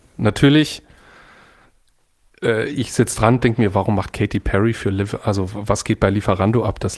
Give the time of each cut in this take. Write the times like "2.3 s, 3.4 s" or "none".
none